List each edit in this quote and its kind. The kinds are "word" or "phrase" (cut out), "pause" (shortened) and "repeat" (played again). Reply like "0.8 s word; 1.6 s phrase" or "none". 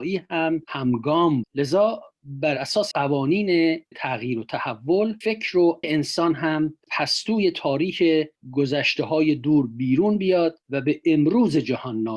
1.4 s word; 2.9 s word; 3.9 s word; 5.2 s word; 5.8 s word; 6.9 s word